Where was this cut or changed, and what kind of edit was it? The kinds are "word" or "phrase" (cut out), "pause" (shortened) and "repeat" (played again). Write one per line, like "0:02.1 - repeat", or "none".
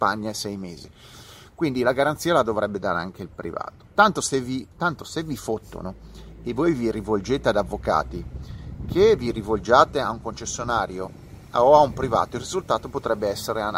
0:04.7 - pause